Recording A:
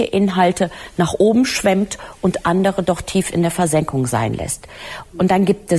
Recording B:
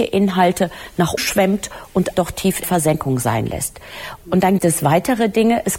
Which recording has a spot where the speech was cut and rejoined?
B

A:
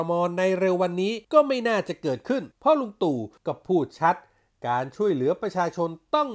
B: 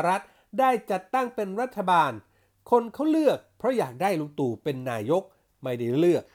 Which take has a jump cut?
A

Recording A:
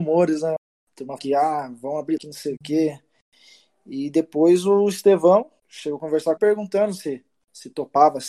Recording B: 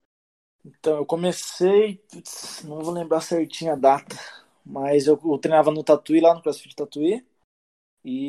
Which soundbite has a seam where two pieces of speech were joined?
A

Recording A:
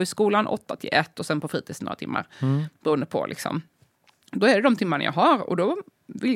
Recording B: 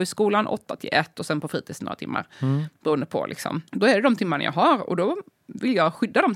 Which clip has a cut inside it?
B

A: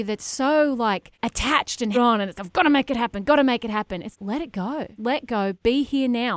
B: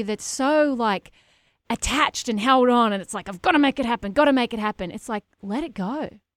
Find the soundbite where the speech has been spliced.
A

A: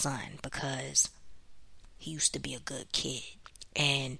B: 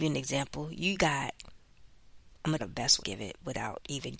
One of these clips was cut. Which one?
B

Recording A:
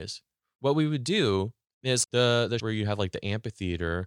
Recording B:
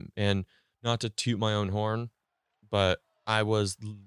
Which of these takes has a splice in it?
A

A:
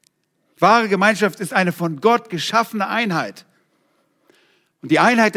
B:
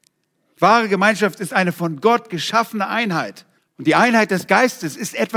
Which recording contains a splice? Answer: B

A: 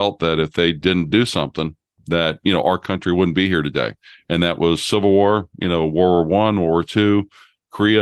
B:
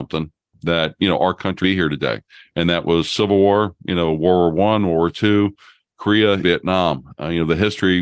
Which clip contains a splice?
B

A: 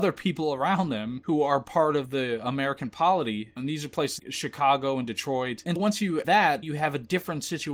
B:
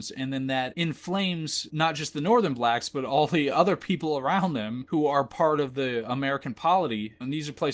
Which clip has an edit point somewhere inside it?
A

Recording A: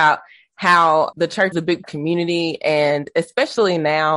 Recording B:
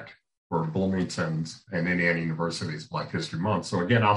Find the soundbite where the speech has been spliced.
A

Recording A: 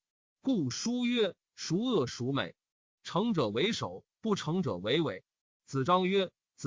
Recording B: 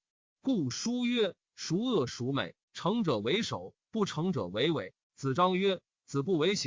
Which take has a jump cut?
B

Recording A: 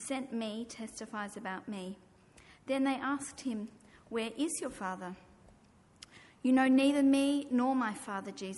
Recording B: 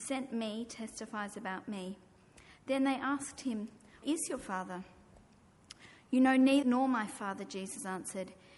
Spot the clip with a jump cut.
B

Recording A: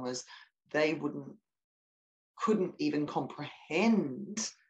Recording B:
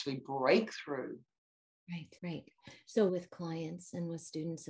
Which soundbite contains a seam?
B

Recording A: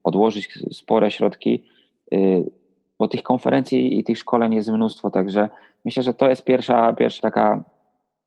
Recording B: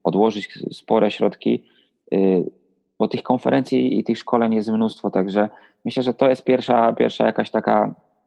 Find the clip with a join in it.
A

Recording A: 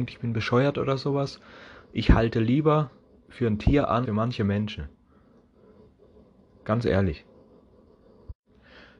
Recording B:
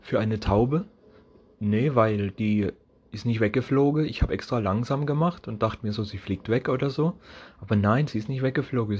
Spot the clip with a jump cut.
A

